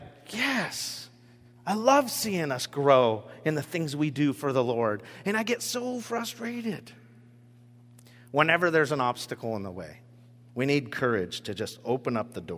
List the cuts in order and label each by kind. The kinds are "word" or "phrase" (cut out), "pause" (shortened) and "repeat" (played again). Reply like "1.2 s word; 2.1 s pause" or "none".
none